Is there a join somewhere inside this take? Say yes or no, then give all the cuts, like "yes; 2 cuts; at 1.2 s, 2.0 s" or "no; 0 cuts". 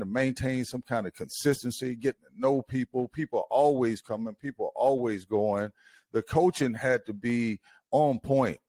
no; 0 cuts